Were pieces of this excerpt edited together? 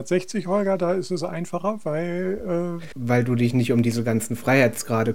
no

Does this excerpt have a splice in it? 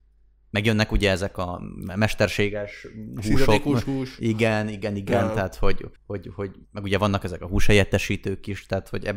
yes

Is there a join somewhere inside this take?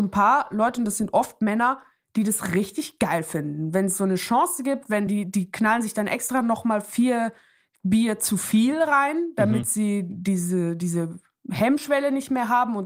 no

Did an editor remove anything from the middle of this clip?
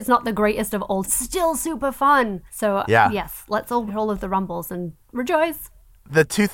yes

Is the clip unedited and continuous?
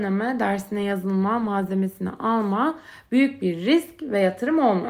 yes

